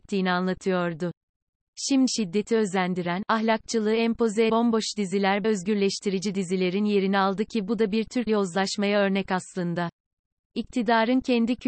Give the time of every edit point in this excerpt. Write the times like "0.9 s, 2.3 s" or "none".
2.1 s, 4.5 s, 5.4 s, 8.3 s